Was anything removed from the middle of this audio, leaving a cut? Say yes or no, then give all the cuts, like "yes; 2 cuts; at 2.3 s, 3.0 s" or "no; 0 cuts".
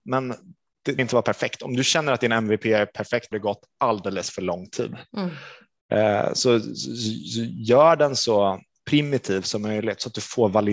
yes; 2 cuts; at 1.0 s, 3.3 s